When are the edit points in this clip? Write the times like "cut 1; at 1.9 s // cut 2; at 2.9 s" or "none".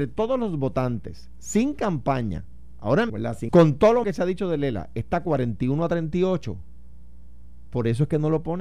cut 1; at 3.1 s // cut 2; at 3.5 s // cut 3; at 4.0 s